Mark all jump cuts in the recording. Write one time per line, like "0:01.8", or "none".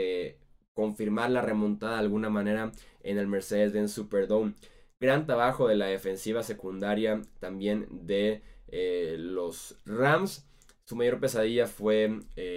none